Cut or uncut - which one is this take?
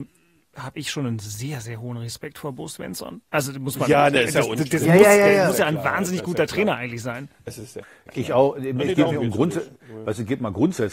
cut